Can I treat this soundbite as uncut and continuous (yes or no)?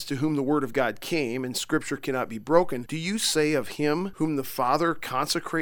yes